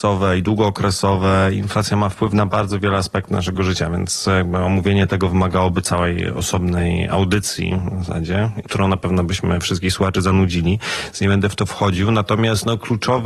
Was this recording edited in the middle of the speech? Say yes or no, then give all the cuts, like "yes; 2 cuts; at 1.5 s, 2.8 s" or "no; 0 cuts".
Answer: no; 0 cuts